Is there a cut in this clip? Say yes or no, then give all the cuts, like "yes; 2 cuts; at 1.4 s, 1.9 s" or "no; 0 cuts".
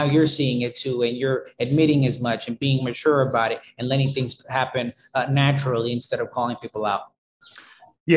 no; 0 cuts